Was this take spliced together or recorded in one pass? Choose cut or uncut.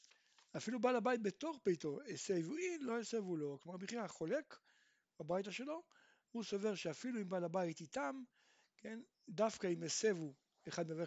uncut